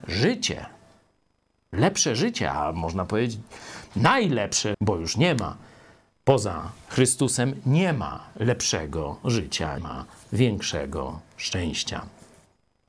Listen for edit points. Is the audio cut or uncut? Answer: cut